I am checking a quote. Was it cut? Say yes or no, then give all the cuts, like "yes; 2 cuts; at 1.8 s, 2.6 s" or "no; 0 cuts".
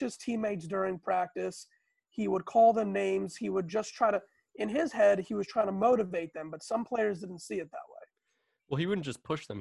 no; 0 cuts